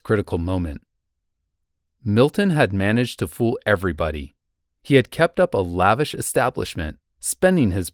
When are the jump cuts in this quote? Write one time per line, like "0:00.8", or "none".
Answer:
none